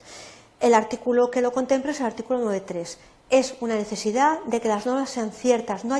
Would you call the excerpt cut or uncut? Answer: uncut